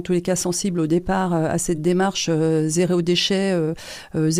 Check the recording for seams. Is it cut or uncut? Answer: uncut